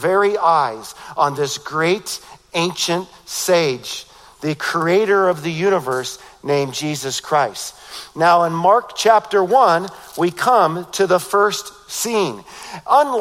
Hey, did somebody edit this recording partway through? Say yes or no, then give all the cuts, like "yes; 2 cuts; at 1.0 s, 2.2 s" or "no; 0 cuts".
no; 0 cuts